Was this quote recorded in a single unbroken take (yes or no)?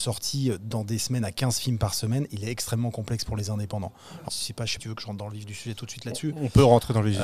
no